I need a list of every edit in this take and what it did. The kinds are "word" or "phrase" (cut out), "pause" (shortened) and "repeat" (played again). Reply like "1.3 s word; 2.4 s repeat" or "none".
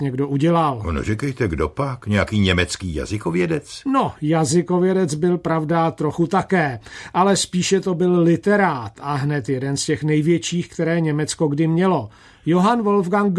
none

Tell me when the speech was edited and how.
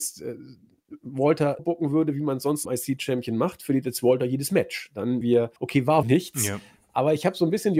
1.6 s word; 2.6 s word; 5.2 s word; 5.6 s pause; 6.0 s word

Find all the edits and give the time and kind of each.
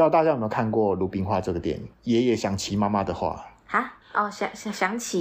1.9 s pause; 4.0 s pause

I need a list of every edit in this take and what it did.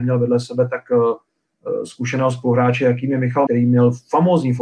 3.5 s word

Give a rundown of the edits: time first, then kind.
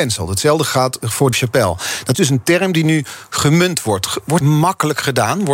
1.3 s word; 2.1 s word; 4.4 s phrase

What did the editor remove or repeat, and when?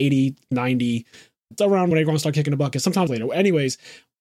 1.6 s word; 1.9 s phrase; 3.1 s phrase

